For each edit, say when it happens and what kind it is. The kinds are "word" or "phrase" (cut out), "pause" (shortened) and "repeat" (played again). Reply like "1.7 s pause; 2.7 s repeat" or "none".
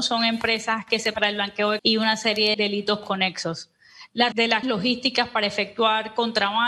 1.1 s word; 1.8 s word; 2.5 s word; 4.3 s word; 4.6 s word